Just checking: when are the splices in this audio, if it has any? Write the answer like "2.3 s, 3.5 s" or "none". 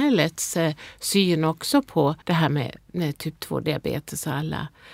2.2 s